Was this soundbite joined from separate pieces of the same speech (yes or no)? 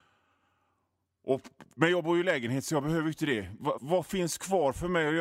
yes